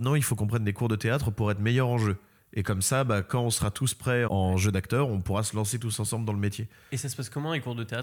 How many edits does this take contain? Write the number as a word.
one